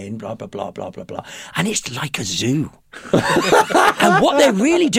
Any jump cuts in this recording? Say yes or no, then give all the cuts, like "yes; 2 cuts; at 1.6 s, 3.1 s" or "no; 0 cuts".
no; 0 cuts